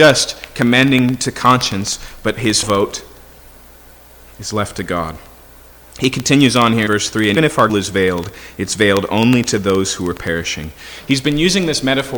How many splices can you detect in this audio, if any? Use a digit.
4